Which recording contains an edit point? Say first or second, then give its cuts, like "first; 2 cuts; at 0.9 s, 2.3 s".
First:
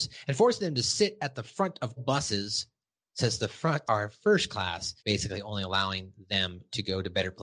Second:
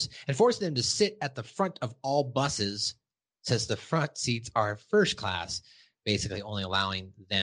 first; 3 cuts; at 2.0 s, 3.9 s, 5.0 s